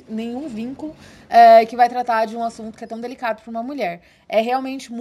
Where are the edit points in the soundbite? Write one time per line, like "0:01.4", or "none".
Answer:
none